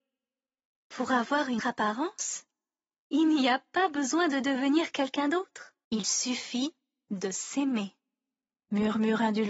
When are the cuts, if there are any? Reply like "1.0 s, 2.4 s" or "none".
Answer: 1.6 s, 5.8 s